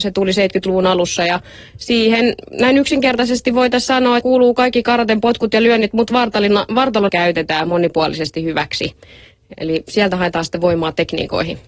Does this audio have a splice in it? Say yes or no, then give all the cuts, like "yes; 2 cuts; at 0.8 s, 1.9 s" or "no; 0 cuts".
yes; 3 cuts; at 2.5 s, 4.2 s, 7.1 s